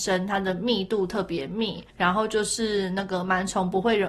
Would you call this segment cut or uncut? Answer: cut